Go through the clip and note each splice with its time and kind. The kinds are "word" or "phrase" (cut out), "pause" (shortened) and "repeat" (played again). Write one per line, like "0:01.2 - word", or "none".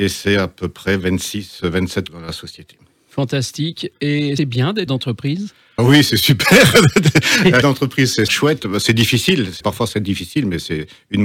0:02.1 - word
0:04.4 - word
0:04.9 - word
0:05.8 - word
0:07.6 - word
0:08.3 - word
0:09.6 - word
0:09.9 - word